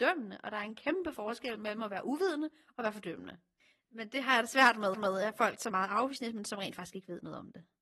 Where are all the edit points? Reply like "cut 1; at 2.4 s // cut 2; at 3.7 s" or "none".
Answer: cut 1; at 4.9 s // cut 2; at 5.7 s